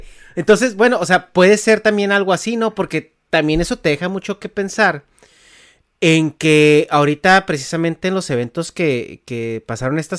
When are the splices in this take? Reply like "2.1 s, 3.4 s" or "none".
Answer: none